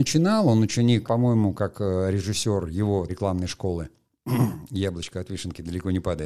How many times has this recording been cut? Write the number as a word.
two